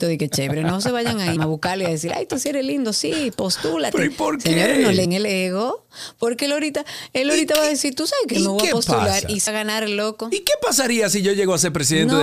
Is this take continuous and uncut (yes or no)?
no